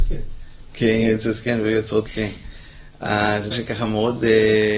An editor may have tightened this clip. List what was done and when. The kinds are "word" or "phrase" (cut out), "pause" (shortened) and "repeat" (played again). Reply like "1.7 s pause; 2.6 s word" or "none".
2.1 s word; 3.5 s word